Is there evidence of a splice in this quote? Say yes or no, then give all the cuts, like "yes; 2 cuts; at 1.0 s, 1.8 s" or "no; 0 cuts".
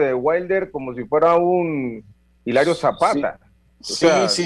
no; 0 cuts